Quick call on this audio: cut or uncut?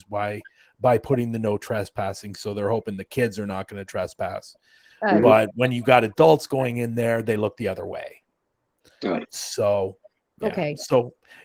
uncut